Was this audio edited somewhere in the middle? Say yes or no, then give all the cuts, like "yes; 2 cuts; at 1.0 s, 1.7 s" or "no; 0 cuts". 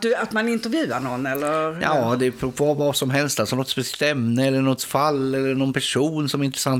no; 0 cuts